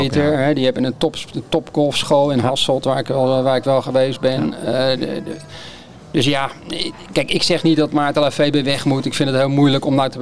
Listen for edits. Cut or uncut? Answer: uncut